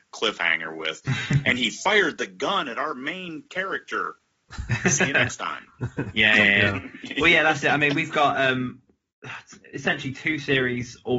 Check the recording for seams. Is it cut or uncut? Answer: uncut